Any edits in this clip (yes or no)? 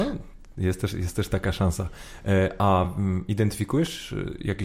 no